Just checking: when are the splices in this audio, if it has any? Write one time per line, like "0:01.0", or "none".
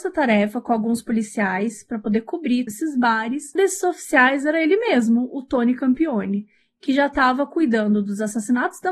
0:02.7
0:03.6